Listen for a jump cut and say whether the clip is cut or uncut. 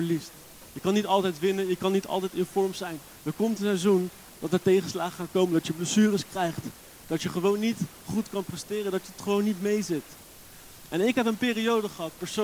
uncut